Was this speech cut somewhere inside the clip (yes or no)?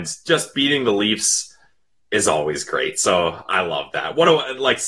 no